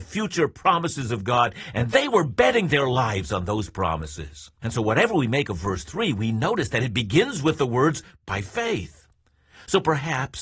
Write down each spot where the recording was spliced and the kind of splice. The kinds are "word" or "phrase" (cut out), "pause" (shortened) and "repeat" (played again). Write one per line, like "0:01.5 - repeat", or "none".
0:04.6 - pause

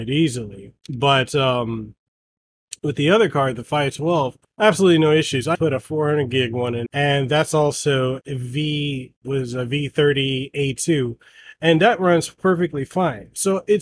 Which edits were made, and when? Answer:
0:04.4 - pause
0:05.5 - word
0:06.9 - word
0:08.2 - word
0:09.2 - pause

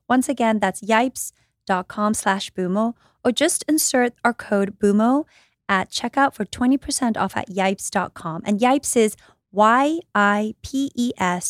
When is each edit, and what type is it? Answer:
none

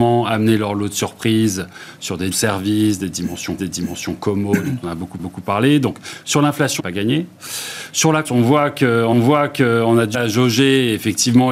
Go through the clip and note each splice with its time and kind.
0:02.3 - word
0:03.6 - repeat
0:05.2 - repeat
0:06.8 - phrase
0:08.2 - word
0:09.1 - repeat
0:10.1 - word

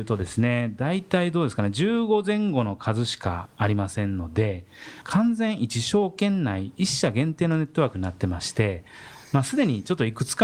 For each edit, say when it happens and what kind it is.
none

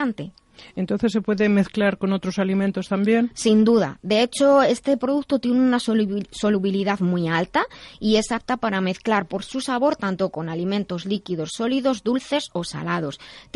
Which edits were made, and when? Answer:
none

